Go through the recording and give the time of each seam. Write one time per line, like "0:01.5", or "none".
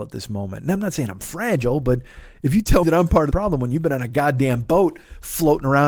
0:02.8
0:03.3